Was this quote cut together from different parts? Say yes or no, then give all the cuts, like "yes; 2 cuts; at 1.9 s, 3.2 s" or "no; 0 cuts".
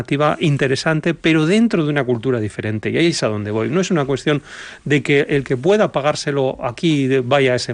no; 0 cuts